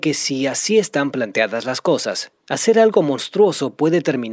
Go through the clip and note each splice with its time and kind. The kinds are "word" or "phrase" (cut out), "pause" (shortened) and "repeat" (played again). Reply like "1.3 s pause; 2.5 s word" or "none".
2.4 s pause